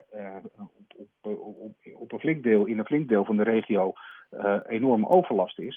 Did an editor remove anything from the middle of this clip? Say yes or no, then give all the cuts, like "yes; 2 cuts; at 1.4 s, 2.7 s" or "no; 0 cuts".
no; 0 cuts